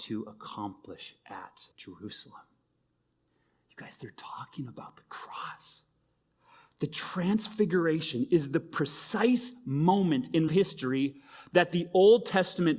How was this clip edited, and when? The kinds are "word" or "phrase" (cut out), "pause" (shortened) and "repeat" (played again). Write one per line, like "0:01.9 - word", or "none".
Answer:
0:01.7 - pause
0:10.5 - word